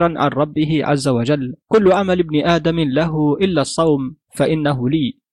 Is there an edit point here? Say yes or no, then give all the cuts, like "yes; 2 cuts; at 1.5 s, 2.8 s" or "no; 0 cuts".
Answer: yes; 1 cut; at 1.6 s